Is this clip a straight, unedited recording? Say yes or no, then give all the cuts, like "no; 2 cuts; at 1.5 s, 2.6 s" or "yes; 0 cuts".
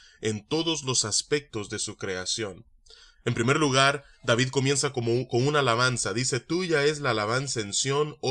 yes; 0 cuts